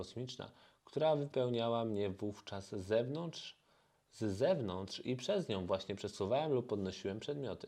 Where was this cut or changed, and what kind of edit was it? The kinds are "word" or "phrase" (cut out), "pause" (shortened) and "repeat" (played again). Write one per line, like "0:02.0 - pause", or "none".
none

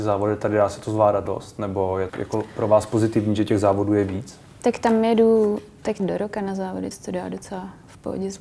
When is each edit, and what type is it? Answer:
0:01.3 - phrase
0:02.1 - phrase
0:06.0 - word
0:06.9 - word

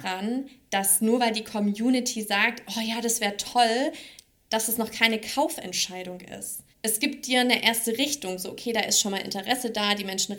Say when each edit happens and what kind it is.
0:06.7 - pause

